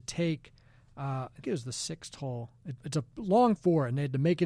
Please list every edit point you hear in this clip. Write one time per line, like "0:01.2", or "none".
0:01.4
0:02.8
0:03.6